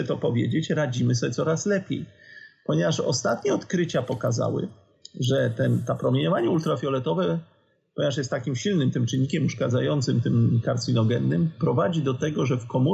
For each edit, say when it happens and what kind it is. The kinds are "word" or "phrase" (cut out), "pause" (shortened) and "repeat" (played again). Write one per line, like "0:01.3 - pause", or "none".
none